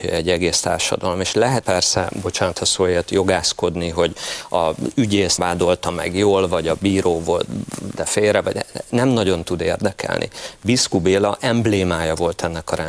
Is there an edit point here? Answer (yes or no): yes